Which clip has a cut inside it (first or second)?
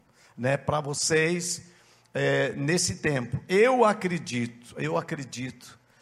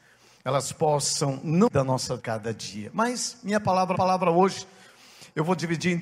second